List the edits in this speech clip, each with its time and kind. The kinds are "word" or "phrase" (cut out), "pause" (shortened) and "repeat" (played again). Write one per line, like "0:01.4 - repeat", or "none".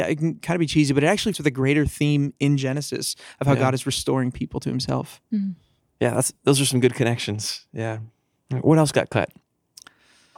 0:01.3 - word